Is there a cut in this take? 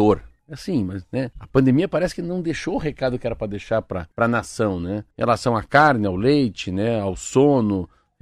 yes; 3 cuts; at 1.3 s, 4.1 s, 5.1 s

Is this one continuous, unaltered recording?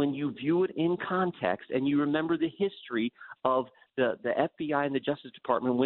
no; 1 cut; at 4.2 s

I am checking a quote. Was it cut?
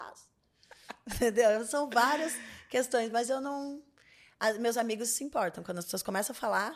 no; 0 cuts

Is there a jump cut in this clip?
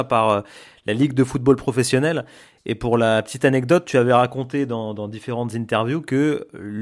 no; 0 cuts

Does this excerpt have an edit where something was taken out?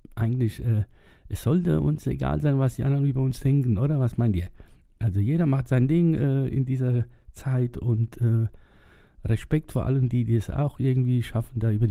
no; 0 cuts

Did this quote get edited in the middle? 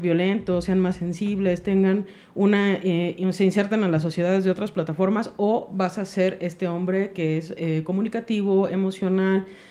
no; 0 cuts

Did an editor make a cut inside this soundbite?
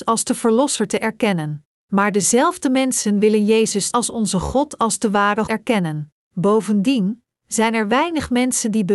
yes; 4 cuts; at 1.7 s, 3.9 s, 5.5 s, 6.2 s

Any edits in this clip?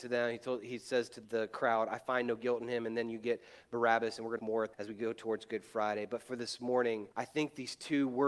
yes; 4 cuts; at 1.2 s, 4.4 s, 4.7 s, 7.1 s

